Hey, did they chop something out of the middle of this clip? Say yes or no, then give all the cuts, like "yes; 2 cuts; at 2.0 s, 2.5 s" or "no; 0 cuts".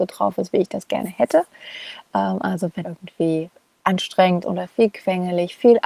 yes; 2 cuts; at 2.8 s, 4.4 s